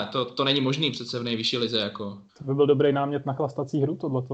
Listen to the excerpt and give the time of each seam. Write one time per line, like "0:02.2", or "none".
0:02.3